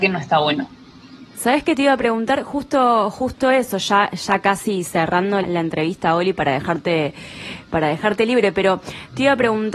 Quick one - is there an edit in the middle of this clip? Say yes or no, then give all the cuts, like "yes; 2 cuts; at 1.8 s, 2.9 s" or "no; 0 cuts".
yes; 1 cut; at 5.4 s